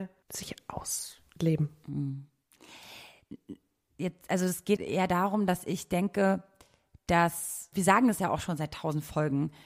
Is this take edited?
yes; 2 cuts; at 4.8 s, 7.7 s

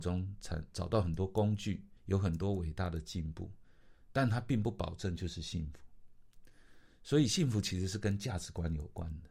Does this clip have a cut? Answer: yes; 1 cut; at 2.0 s

